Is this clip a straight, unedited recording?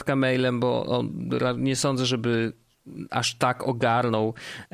yes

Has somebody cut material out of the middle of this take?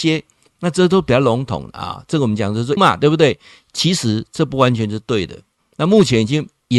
yes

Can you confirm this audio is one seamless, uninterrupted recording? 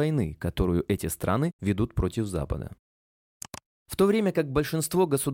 no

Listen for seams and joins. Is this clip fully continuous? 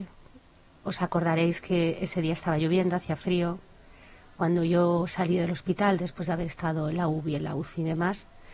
yes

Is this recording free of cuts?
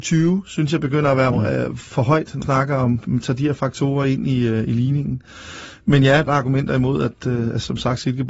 no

